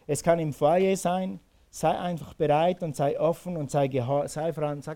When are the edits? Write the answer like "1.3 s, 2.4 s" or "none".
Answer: none

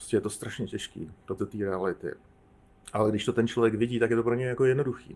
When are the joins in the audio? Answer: 1.4 s

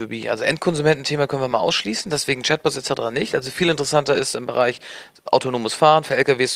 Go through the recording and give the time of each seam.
none

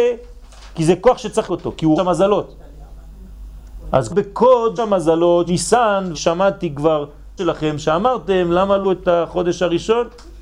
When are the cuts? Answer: 1.5 s, 2.0 s, 4.1 s, 4.8 s, 5.5 s, 6.1 s, 7.4 s, 7.8 s, 8.8 s

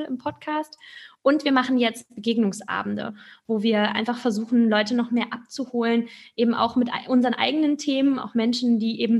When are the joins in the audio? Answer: none

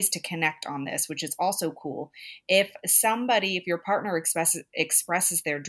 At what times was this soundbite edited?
none

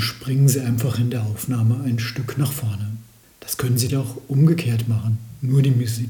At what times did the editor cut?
3.2 s, 3.9 s

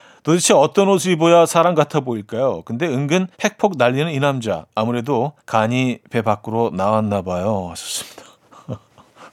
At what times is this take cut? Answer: 3.3 s, 5.4 s

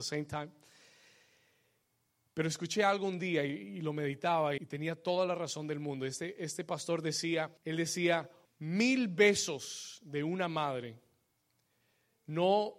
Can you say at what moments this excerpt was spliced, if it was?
4.6 s, 7.6 s, 8.5 s

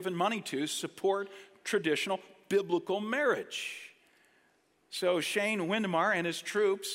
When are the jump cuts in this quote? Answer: none

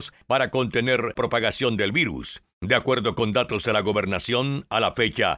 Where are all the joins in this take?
1.2 s, 2.5 s

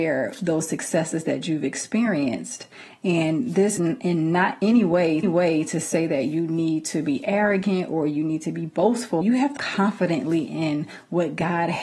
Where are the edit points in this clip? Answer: 3.8 s, 5.2 s, 9.2 s, 9.6 s

